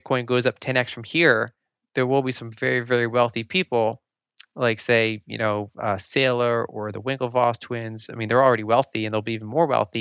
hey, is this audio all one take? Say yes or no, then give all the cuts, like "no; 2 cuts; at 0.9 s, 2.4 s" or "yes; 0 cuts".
yes; 0 cuts